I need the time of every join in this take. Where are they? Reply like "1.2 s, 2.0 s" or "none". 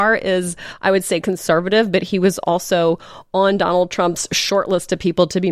1.2 s